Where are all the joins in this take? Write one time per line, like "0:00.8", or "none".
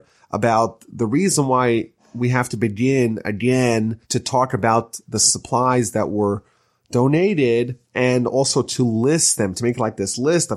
0:04.0
0:07.8